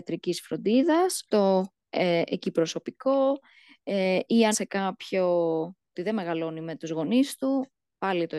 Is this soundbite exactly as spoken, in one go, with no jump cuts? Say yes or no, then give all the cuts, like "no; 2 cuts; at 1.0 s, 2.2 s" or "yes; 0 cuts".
no; 3 cuts; at 1.3 s, 4.5 s, 5.9 s